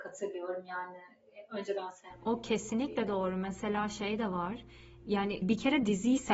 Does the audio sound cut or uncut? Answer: cut